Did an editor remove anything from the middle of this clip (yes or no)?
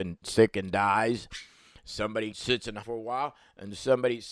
yes